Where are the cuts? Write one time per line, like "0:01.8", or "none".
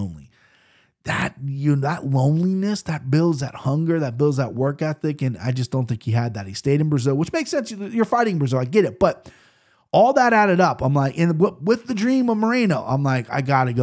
none

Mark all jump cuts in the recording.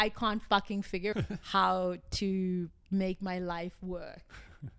0:01.1

